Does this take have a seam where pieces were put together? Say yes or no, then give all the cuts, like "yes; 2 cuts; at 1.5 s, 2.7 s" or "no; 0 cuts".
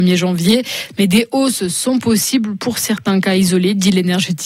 no; 0 cuts